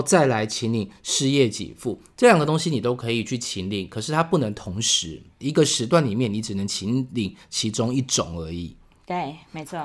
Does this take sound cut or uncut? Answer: uncut